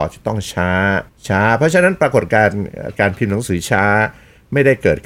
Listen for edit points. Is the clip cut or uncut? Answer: cut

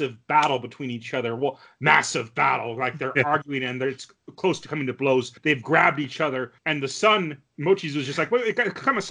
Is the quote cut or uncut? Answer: cut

